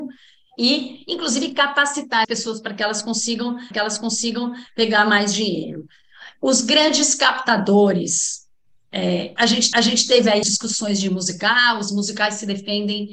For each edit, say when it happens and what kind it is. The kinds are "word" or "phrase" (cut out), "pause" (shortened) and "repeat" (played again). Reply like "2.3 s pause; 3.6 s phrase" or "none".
2.2 s word; 3.7 s repeat; 9.4 s word; 9.7 s repeat; 10.4 s word